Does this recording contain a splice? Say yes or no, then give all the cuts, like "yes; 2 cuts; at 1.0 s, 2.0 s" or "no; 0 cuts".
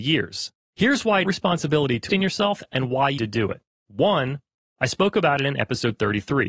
yes; 3 cuts; at 1.2 s, 2.1 s, 3.2 s